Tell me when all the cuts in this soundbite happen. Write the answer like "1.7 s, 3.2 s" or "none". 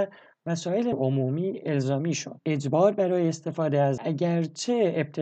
0.9 s, 4.0 s